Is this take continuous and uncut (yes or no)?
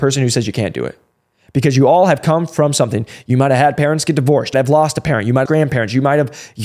no